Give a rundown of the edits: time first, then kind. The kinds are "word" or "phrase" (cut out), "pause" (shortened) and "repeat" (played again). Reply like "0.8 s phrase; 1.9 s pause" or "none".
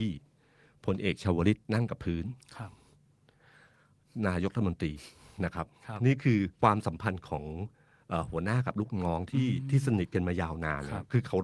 1.6 s pause; 6.5 s pause